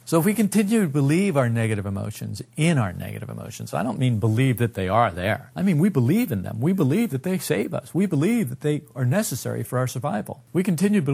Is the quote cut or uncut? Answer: uncut